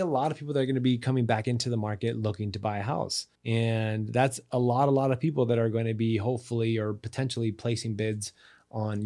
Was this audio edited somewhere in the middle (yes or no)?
yes